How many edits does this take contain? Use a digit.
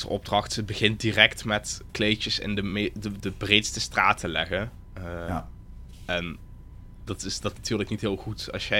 4